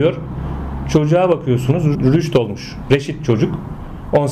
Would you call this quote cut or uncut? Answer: cut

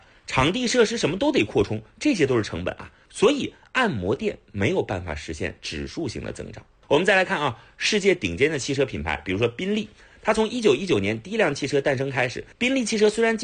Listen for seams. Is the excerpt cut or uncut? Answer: cut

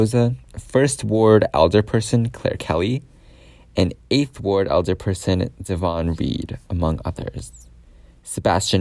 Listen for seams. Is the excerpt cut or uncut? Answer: uncut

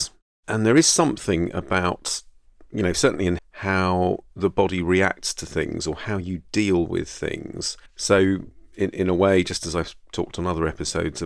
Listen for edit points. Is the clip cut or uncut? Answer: cut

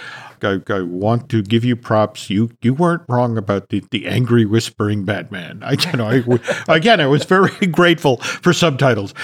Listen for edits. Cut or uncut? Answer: cut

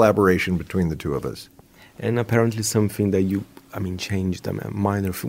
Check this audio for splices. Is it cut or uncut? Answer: uncut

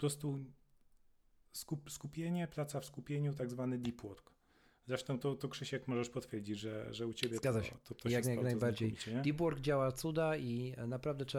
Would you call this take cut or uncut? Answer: uncut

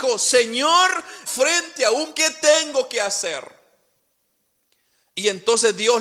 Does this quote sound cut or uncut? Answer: cut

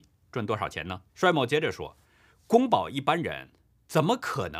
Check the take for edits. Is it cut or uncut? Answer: cut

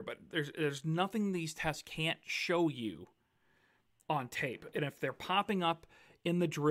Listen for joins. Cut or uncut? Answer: uncut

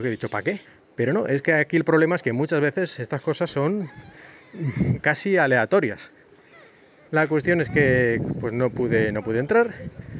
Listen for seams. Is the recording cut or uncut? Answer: uncut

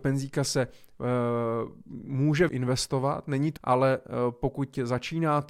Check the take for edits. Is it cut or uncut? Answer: cut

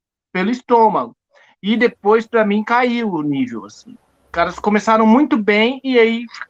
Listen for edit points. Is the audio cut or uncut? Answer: uncut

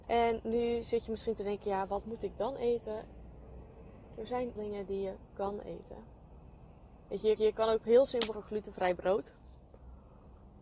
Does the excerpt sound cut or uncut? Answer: cut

